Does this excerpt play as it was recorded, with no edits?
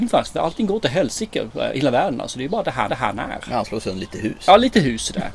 no; 1 cut; at 2.9 s

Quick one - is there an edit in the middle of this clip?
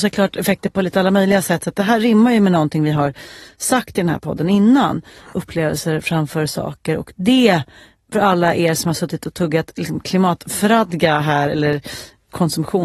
no; 0 cuts

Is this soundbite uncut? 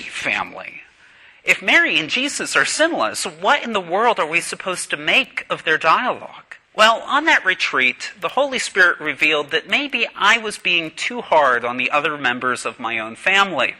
no; 1 cut; at 6.6 s

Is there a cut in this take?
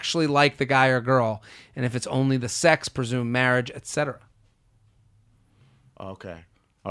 no; 0 cuts

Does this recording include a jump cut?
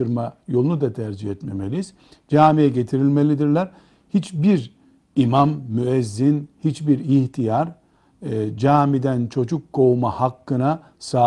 no; 0 cuts

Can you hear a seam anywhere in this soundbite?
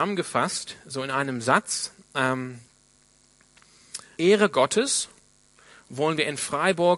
yes; 1 cut; at 4.2 s

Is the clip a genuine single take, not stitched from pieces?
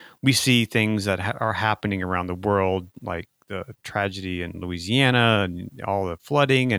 yes; 0 cuts

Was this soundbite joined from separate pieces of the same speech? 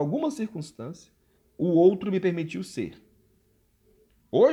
yes; 1 cut; at 1.4 s

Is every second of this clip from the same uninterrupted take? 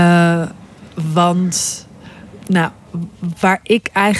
yes; 0 cuts

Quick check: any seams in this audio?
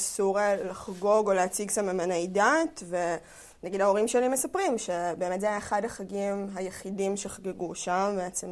no; 0 cuts

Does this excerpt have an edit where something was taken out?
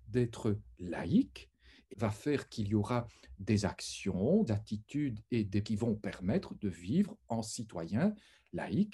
yes; 3 cuts; at 1.9 s, 4.5 s, 5.6 s

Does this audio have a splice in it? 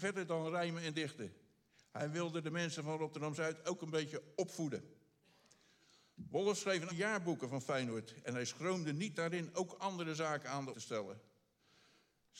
yes; 2 cuts; at 6.9 s, 10.7 s

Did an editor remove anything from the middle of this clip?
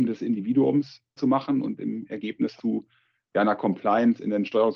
yes; 2 cuts; at 1.2 s, 2.6 s

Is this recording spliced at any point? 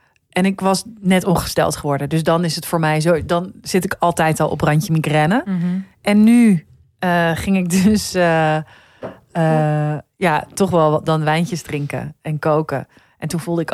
no; 0 cuts

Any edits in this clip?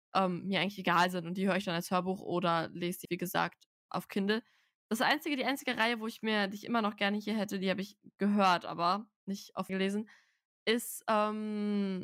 yes; 3 cuts; at 3.0 s, 3.9 s, 9.7 s

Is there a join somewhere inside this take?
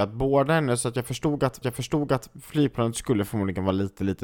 yes; 1 cut; at 1.6 s

